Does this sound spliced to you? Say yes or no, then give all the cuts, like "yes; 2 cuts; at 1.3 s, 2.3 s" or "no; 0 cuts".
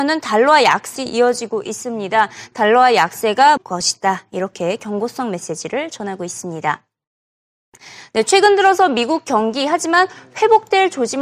yes; 2 cuts; at 1.0 s, 3.6 s